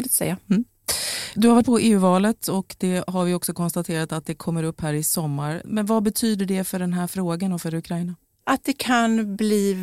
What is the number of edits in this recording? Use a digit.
1